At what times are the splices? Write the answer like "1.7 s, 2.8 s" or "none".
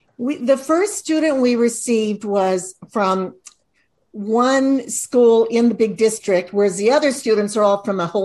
none

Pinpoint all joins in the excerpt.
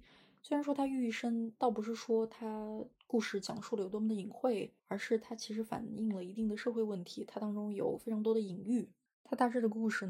4.8 s, 9.1 s

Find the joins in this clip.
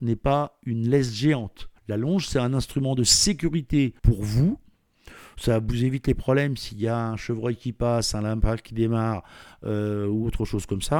1.8 s, 4.0 s

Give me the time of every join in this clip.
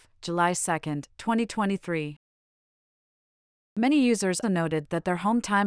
4.4 s

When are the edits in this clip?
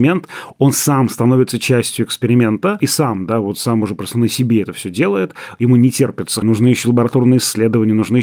6.4 s

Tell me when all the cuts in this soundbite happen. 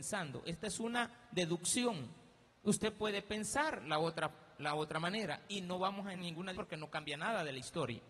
2.5 s, 6.2 s, 6.5 s

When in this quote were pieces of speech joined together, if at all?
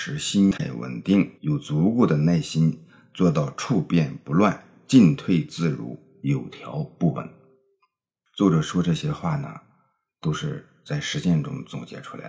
1.4 s

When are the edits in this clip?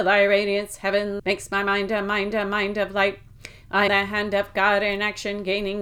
1.2 s, 2.3 s, 3.9 s

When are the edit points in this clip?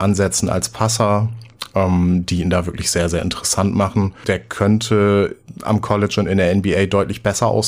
none

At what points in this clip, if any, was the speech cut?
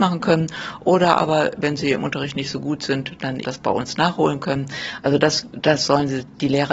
3.4 s

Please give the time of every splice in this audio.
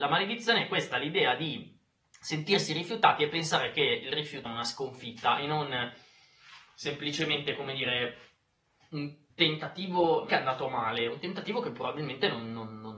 2.0 s, 4.5 s, 9.3 s, 10.3 s

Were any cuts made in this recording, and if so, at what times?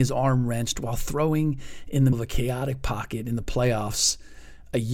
2.1 s

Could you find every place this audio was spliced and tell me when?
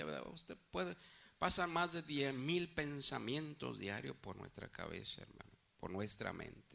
none

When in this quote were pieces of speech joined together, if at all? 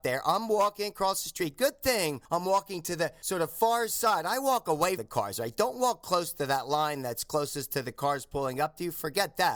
5.0 s

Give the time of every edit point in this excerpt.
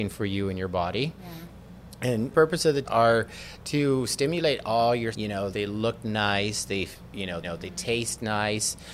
2.3 s, 2.8 s, 5.1 s, 5.5 s, 7.4 s

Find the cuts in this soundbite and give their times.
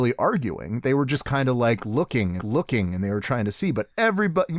2.4 s

